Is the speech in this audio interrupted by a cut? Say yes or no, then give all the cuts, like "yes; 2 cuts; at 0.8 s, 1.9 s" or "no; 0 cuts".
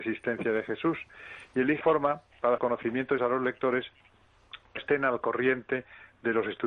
yes; 4 cuts; at 1.8 s, 2.6 s, 3.2 s, 4.8 s